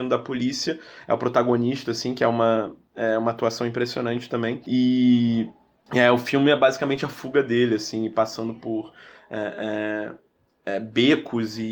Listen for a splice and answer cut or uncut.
uncut